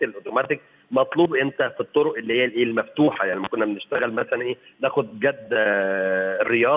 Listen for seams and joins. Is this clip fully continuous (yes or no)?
yes